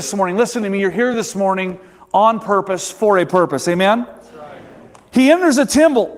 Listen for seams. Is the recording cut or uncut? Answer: uncut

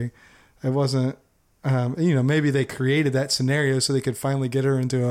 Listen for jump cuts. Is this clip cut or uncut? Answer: uncut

